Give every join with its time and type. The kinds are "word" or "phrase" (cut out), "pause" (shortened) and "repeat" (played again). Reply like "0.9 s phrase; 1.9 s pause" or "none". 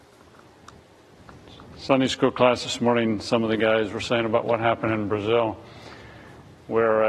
none